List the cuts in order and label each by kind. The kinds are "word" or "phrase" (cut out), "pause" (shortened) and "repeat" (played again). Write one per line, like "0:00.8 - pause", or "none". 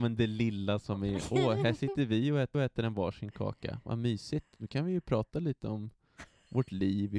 0:02.5 - repeat